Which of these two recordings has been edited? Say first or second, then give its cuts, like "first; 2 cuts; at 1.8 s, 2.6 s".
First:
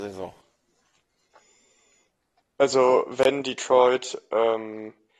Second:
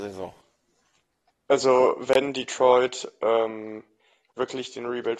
second; 1 cut; at 1.1 s